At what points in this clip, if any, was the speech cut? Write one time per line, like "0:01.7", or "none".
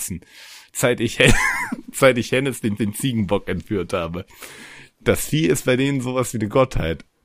0:02.8